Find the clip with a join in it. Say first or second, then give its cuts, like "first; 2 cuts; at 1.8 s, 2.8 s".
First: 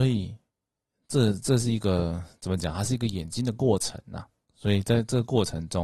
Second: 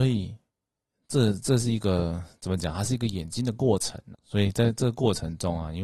second; 1 cut; at 4.1 s